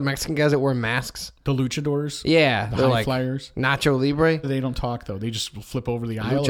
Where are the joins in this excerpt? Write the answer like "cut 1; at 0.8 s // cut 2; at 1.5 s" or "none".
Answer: cut 1; at 4.4 s